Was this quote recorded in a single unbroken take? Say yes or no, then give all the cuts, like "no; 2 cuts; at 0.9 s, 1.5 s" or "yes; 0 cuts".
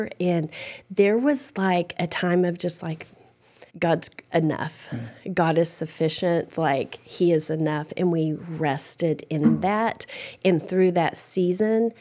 no; 1 cut; at 3.7 s